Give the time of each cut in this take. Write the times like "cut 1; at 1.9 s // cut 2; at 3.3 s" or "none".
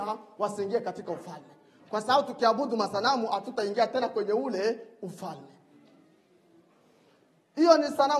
none

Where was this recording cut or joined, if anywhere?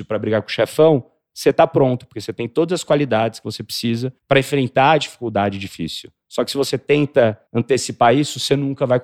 cut 1; at 4.2 s // cut 2; at 7.5 s

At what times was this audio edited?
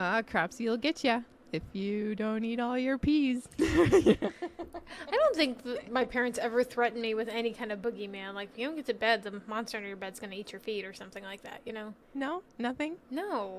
cut 1; at 12.0 s

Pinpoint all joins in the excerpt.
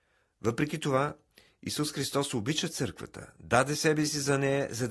none

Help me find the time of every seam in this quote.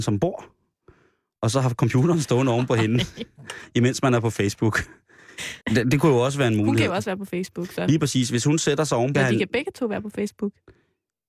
cut 1; at 5.6 s // cut 2; at 9.1 s

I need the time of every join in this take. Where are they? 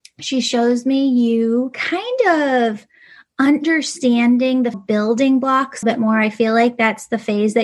cut 1; at 4.7 s // cut 2; at 5.8 s

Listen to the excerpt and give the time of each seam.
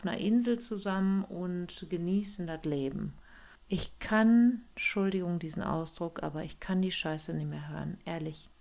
cut 1; at 3.5 s

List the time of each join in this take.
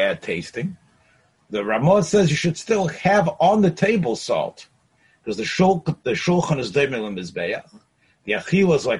none

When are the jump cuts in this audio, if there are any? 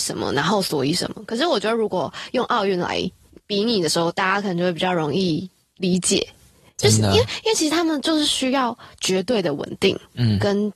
none

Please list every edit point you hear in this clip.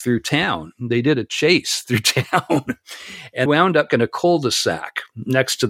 cut 1; at 3.5 s // cut 2; at 3.9 s

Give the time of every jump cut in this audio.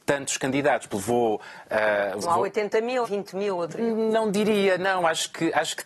cut 1; at 0.9 s // cut 2; at 2.2 s // cut 3; at 3.0 s // cut 4; at 3.8 s

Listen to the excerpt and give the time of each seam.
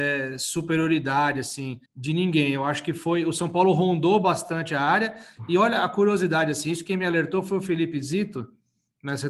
cut 1; at 1.9 s

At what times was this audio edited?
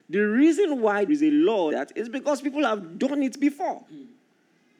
cut 1; at 1.1 s // cut 2; at 1.7 s // cut 3; at 3.9 s

